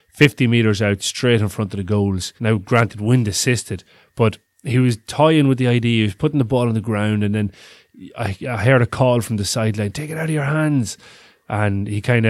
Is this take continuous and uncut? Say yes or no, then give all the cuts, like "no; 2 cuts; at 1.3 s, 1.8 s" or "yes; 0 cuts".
no; 1 cut; at 2.4 s